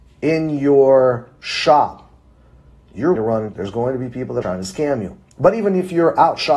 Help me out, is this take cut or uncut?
cut